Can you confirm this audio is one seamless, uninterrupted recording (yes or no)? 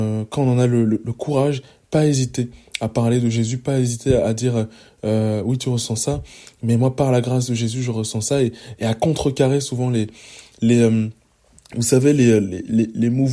yes